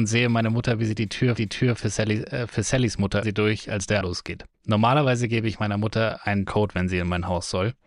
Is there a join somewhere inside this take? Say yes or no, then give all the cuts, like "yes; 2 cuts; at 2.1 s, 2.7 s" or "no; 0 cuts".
yes; 5 cuts; at 1.4 s, 3.2 s, 4.0 s, 4.5 s, 6.5 s